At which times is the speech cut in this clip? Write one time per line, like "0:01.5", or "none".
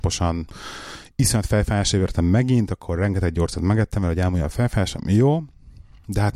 none

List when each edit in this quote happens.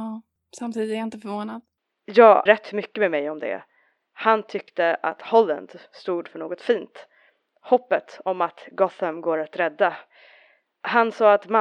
0:02.5

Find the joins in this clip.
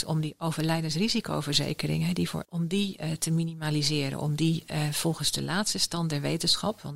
0:02.4

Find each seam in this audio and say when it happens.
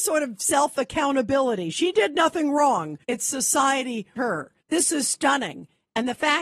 0:03.0
0:04.2
0:04.6

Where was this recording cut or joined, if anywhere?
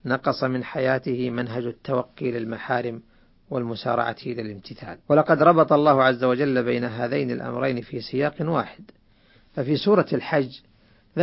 0:05.0

